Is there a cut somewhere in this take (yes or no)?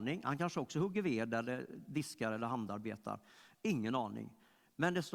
no